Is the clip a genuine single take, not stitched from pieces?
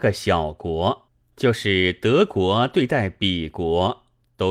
no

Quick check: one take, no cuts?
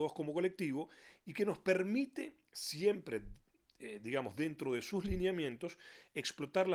yes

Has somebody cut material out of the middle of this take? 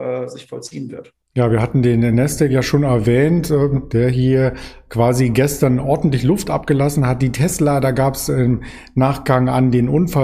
yes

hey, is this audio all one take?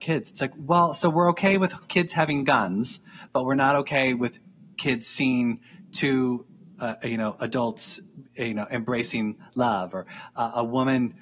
yes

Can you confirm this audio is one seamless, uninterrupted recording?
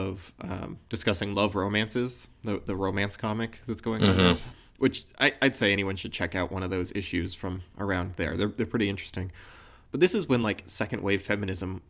yes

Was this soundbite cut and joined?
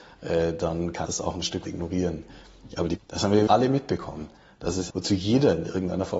yes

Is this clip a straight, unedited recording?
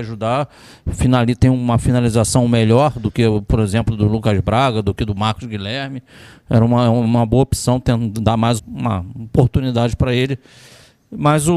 no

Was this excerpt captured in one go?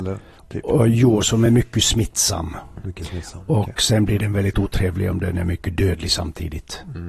yes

